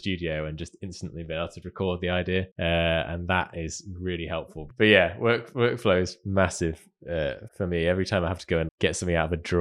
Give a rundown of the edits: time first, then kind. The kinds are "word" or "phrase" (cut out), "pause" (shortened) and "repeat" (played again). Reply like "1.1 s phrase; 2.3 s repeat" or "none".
1.6 s word; 2.5 s pause; 7.5 s word; 8.7 s word